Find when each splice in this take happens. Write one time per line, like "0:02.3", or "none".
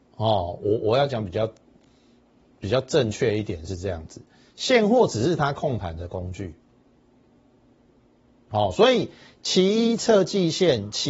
none